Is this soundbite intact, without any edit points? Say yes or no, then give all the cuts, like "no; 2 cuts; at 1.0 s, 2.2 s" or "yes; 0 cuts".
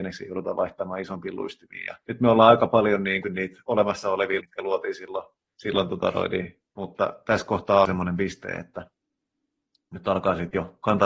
no; 6 cuts; at 2.0 s, 3.2 s, 4.4 s, 5.5 s, 6.7 s, 7.9 s